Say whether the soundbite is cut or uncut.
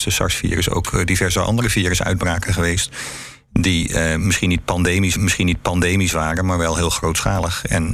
cut